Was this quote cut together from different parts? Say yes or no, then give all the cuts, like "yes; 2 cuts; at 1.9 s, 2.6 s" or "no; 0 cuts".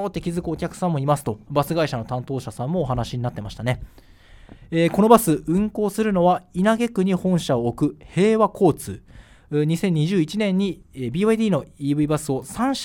no; 0 cuts